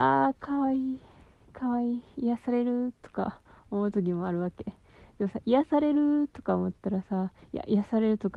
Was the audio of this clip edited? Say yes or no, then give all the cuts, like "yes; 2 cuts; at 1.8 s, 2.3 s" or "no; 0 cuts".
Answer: no; 0 cuts